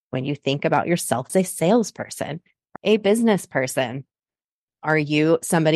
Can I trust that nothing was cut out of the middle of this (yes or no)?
no